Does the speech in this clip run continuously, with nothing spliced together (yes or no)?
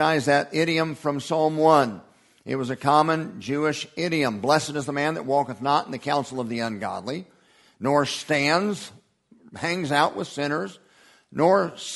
yes